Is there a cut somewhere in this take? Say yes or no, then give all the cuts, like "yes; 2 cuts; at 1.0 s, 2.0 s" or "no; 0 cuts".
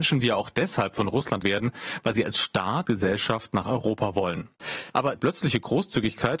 yes; 3 cuts; at 1.4 s, 2.8 s, 5.2 s